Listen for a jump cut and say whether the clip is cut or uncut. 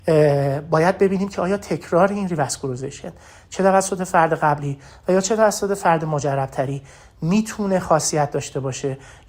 uncut